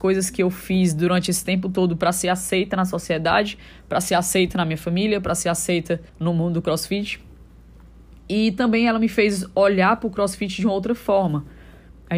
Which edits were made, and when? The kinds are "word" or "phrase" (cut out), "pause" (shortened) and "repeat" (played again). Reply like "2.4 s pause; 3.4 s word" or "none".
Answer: 6.1 s pause